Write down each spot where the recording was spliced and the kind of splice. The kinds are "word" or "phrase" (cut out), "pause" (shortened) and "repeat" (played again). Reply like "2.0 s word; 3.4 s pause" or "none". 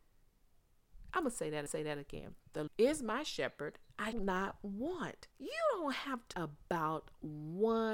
1.7 s repeat; 2.7 s word; 4.1 s word; 5.3 s pause; 6.3 s word

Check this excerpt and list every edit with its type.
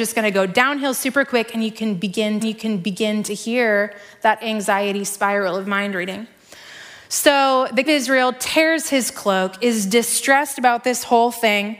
2.4 s repeat; 7.9 s phrase

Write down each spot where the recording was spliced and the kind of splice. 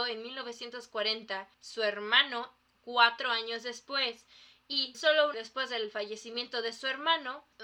1.5 s pause; 4.9 s word; 5.3 s word

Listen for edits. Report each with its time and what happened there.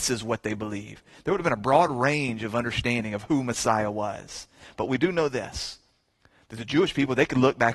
none

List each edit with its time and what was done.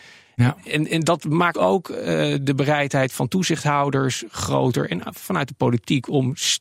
1.5 s word

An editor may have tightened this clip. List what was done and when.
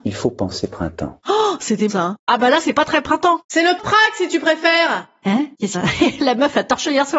1.9 s word; 3.8 s word; 5.7 s phrase

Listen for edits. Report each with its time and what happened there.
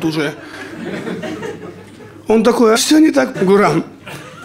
2.8 s word; 3.3 s word

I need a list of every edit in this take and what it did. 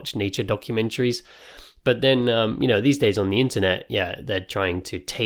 none

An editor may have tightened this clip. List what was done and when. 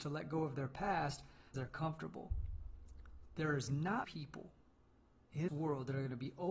1.5 s word; 4.0 s word; 5.5 s word

